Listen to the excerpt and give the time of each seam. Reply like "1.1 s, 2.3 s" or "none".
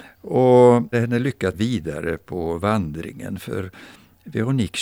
0.9 s, 1.5 s